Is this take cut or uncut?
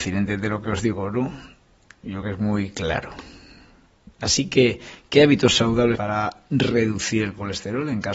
cut